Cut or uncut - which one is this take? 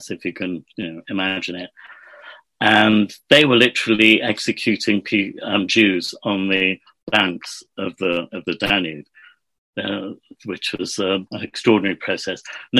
cut